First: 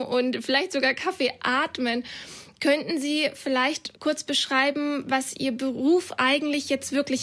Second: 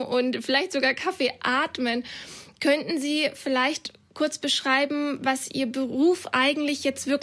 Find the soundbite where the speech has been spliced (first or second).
first